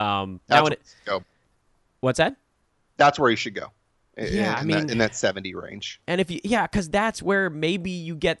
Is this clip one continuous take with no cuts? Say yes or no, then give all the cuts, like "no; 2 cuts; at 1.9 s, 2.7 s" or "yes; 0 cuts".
no; 1 cut; at 1.2 s